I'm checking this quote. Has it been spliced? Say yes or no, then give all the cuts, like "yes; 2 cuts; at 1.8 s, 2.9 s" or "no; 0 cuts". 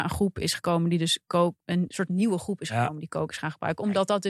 no; 0 cuts